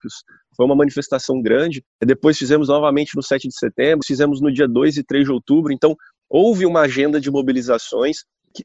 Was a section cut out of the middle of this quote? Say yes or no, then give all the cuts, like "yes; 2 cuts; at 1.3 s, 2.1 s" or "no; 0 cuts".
yes; 1 cut; at 4.0 s